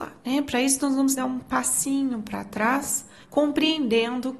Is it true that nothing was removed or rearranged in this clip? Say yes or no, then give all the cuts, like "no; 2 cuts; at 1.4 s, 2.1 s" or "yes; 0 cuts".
no; 2 cuts; at 1.2 s, 3.2 s